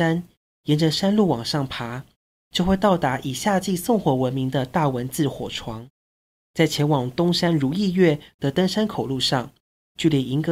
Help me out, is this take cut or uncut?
uncut